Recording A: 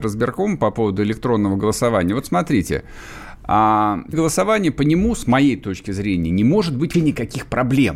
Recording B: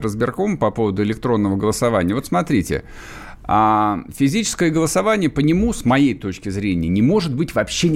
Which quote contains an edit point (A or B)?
A